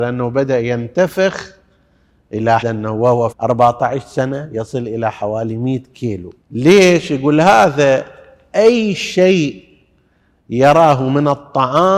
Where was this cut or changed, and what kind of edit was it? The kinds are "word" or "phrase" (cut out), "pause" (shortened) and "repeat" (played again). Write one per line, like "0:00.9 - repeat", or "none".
0:02.6 - word
0:03.3 - phrase
0:06.4 - pause